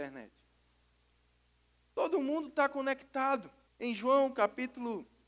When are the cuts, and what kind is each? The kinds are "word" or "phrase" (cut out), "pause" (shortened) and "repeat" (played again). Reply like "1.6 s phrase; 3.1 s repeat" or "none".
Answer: 3.6 s pause

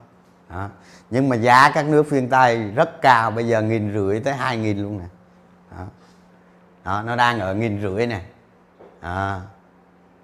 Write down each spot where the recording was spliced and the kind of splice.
none

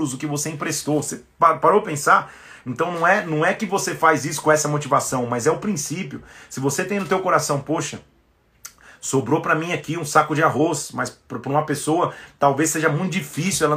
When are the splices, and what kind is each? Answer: none

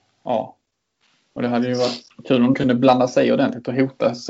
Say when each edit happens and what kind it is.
2.1 s word; 2.5 s word

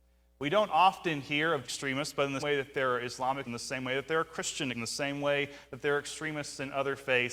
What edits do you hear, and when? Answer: 1.6 s word; 2.4 s word; 3.4 s word; 4.7 s word

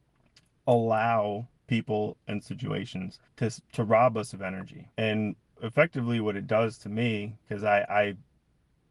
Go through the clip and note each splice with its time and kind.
1.6 s pause; 3.3 s pause; 4.9 s pause

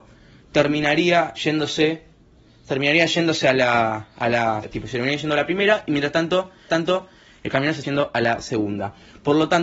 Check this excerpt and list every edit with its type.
1.4 s word; 4.6 s word; 6.7 s repeat; 7.8 s word

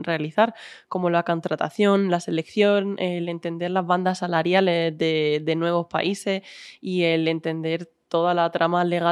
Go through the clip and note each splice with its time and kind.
none

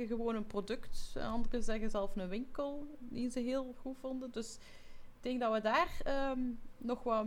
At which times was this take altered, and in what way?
none

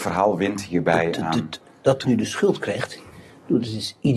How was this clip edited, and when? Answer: 2.0 s word

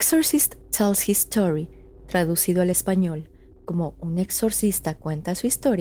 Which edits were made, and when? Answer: none

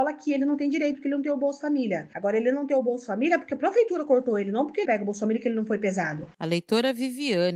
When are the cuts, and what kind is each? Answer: 4.8 s word

